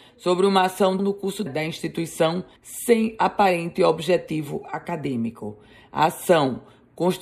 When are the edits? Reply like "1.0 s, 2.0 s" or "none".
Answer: 1.0 s, 1.5 s, 2.6 s